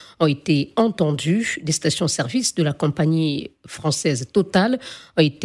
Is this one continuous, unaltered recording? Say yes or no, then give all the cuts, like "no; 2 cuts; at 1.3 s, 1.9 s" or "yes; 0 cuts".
yes; 0 cuts